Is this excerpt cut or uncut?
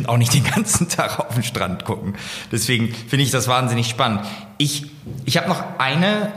uncut